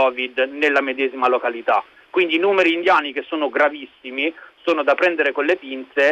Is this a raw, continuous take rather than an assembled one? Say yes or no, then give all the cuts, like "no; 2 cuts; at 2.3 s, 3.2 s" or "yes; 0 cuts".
yes; 0 cuts